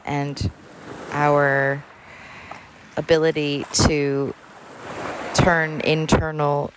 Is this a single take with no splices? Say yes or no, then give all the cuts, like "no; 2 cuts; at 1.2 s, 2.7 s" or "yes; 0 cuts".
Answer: yes; 0 cuts